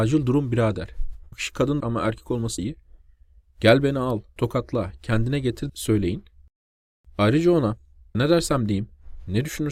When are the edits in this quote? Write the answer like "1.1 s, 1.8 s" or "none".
1.3 s, 1.8 s, 2.6 s, 4.4 s, 5.7 s, 8.1 s